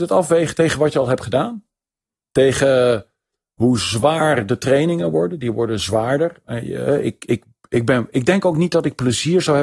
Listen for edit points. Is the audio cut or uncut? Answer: uncut